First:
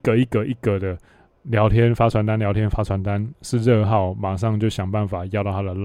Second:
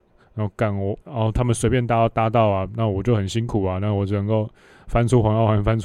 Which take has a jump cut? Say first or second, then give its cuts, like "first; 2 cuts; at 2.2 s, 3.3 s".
second; 1 cut; at 1.0 s